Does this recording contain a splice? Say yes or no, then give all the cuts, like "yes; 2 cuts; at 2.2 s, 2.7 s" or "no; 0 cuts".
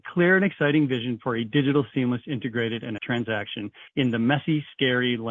yes; 2 cuts; at 3.0 s, 3.9 s